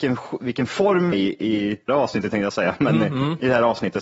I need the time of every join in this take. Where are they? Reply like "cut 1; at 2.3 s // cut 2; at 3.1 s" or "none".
cut 1; at 1.1 s // cut 2; at 1.9 s